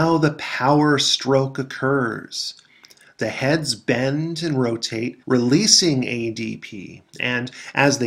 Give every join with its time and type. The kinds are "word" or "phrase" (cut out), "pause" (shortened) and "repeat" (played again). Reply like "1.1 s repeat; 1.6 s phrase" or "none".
5.2 s pause